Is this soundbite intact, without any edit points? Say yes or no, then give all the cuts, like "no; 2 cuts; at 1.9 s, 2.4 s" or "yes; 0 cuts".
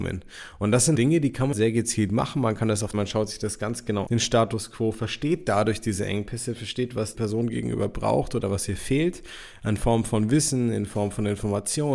no; 5 cuts; at 0.9 s, 1.5 s, 2.9 s, 4.1 s, 7.1 s